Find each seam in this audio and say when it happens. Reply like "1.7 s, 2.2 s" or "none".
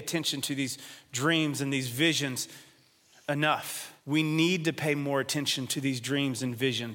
4.0 s